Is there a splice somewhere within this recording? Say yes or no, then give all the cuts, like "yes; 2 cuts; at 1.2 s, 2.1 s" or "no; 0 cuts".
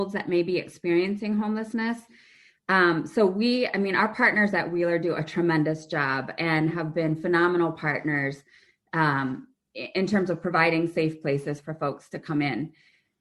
no; 0 cuts